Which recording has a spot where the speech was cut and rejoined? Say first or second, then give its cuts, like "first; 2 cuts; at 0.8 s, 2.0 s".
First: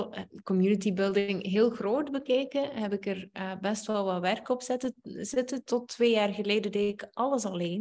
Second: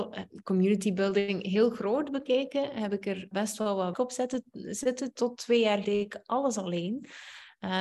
second; 3 cuts; at 3.3 s, 3.9 s, 5.8 s